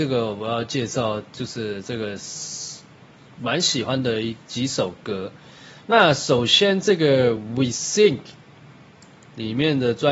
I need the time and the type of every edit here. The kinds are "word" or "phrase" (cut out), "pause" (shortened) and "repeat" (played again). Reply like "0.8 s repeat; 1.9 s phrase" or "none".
none